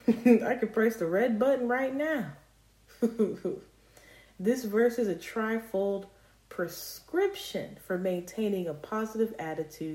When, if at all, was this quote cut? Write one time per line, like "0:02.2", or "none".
none